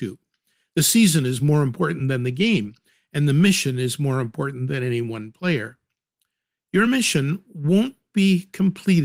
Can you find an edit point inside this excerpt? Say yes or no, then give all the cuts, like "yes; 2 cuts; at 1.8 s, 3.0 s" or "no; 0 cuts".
no; 0 cuts